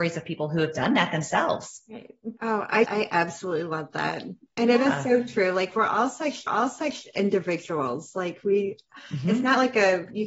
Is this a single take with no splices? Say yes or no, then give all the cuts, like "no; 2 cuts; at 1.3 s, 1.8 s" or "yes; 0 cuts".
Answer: no; 3 cuts; at 2.4 s, 2.8 s, 6.5 s